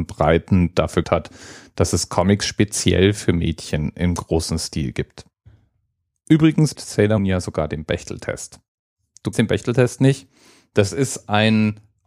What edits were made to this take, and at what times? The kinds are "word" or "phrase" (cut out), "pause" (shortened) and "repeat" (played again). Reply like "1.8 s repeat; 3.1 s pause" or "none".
1.0 s word; 6.8 s word; 7.2 s word; 9.3 s word